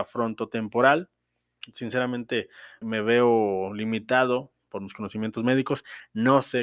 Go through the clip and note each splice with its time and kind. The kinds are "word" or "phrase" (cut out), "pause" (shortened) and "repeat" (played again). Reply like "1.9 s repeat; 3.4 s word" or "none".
2.8 s word